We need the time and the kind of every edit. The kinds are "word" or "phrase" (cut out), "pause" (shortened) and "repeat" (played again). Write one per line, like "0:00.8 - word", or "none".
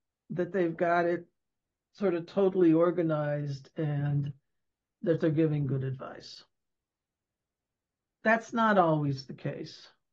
none